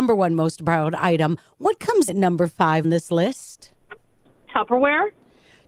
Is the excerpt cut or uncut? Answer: cut